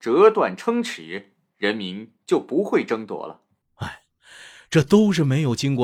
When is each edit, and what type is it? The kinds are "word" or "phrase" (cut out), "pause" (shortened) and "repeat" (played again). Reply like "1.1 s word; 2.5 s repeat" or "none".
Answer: 3.6 s pause